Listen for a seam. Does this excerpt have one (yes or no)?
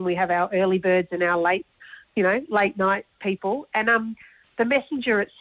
no